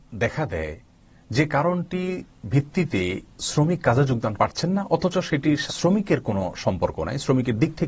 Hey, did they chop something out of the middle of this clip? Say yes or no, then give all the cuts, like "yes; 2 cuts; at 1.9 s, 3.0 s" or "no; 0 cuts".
yes; 2 cuts; at 4.4 s, 5.7 s